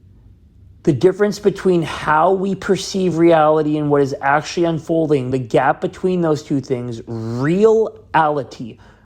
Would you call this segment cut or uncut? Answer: uncut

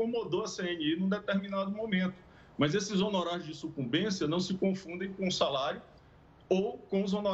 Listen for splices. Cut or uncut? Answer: uncut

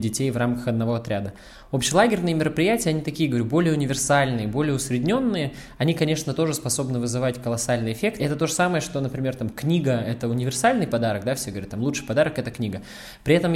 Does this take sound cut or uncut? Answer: uncut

